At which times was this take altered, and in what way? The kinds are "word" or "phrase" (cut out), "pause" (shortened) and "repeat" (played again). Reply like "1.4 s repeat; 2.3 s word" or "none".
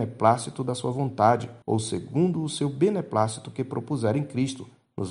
1.6 s pause